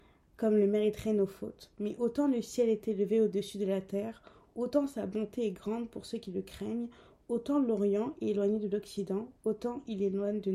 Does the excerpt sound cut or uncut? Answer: uncut